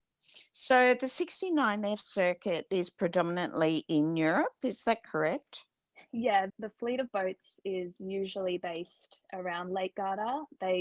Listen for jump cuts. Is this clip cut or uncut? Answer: cut